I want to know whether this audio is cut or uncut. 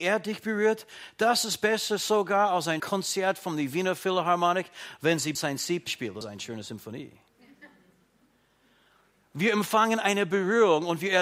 cut